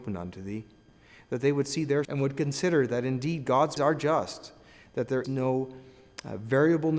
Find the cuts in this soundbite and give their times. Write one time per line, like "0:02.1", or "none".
0:02.0
0:03.8
0:05.2